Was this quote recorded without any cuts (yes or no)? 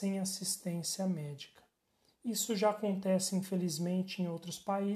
yes